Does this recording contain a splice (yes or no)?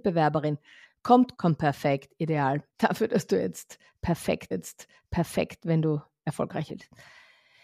yes